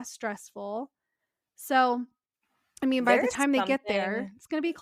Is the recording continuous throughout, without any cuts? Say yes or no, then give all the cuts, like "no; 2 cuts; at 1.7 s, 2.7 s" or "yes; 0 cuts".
yes; 0 cuts